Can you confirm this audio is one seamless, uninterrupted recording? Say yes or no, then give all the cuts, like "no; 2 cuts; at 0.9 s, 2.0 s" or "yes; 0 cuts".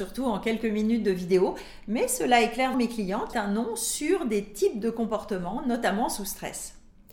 no; 2 cuts; at 2.7 s, 3.3 s